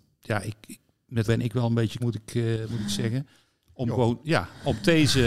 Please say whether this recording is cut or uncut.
cut